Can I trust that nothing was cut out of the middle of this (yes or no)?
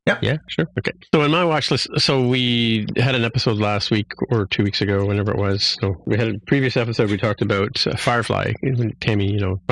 yes